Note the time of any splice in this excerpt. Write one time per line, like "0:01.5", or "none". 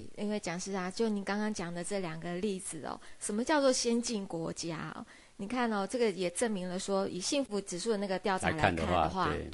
none